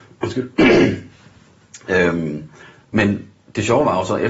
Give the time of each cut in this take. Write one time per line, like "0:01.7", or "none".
0:02.8